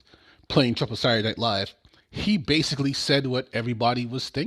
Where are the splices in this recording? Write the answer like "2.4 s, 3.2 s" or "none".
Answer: none